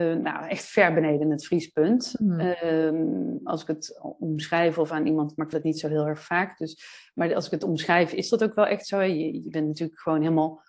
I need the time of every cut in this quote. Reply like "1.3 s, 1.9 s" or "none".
5.5 s